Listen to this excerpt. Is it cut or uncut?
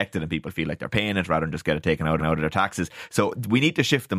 cut